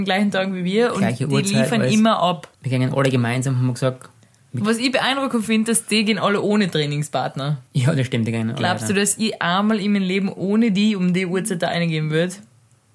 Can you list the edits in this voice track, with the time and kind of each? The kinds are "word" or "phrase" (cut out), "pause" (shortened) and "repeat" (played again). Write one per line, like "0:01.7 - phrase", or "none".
0:02.5 - pause
0:07.7 - pause